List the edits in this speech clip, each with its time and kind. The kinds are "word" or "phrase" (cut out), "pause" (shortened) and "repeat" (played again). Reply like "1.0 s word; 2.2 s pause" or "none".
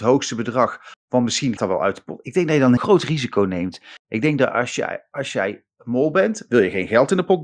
1.6 s word; 2.8 s word

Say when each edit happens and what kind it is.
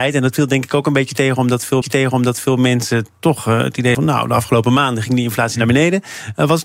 1.8 s repeat; 3.9 s word

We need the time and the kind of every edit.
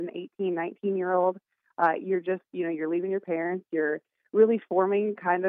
none

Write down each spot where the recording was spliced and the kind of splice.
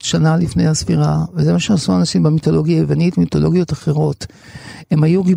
none

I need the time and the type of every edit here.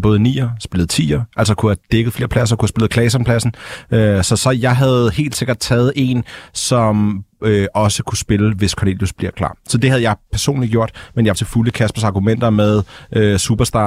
11.3 s word

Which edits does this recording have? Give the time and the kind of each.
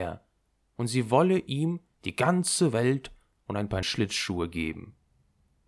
3.8 s word

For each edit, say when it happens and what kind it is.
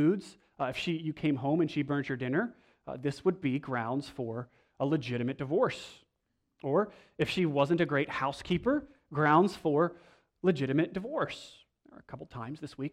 none

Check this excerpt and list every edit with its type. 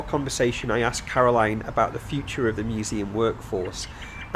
none

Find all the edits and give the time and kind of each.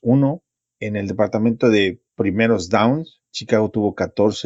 2.1 s pause; 3.2 s pause

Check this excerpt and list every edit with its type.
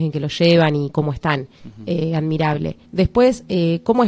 1.5 s pause; 2.9 s pause

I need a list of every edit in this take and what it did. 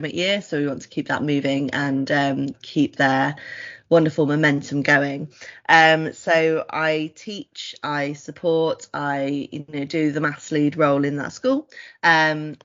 none

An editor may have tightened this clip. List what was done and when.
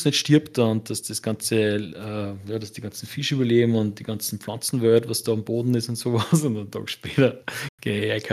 7.4 s pause

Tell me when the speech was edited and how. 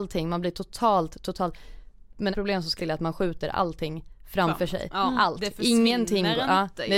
2.3 s word; 2.8 s word

